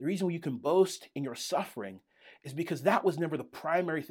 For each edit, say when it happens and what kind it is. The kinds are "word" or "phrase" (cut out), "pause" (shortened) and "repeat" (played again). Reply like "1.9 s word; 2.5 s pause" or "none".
none